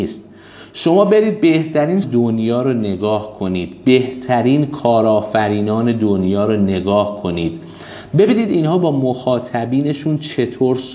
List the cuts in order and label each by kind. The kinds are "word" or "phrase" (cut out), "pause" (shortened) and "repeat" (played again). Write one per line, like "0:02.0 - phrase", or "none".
0:02.0 - word